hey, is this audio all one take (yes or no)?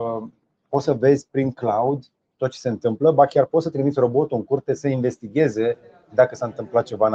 yes